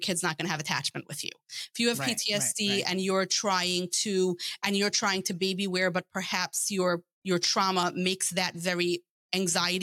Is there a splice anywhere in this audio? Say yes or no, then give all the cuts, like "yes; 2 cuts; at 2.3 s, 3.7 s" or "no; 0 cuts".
no; 0 cuts